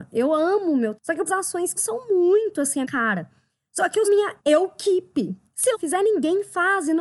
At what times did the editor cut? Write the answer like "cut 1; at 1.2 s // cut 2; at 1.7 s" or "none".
cut 1; at 0.9 s // cut 2; at 1.3 s // cut 3; at 1.8 s // cut 4; at 2.8 s // cut 5; at 4.0 s // cut 6; at 4.4 s // cut 7; at 5.7 s